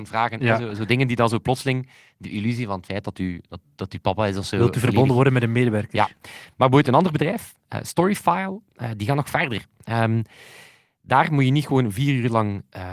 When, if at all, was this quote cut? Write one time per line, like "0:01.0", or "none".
none